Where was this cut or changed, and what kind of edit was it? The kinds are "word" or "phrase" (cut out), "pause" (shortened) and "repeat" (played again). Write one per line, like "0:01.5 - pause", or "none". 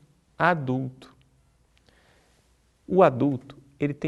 none

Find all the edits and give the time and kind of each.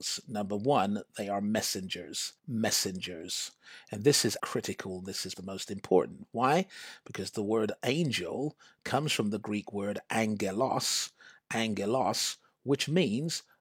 0:02.4 - pause
0:04.4 - word
0:05.3 - word

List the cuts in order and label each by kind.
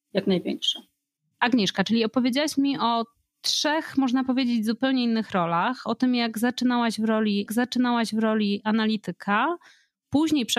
0:07.5 - repeat

